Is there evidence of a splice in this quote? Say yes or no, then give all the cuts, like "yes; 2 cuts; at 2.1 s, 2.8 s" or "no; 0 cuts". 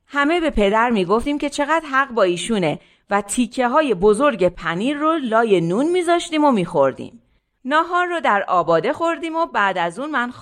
no; 0 cuts